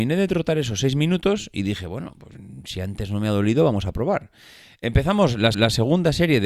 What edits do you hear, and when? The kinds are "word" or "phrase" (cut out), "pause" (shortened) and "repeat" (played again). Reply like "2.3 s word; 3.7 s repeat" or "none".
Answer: 5.5 s repeat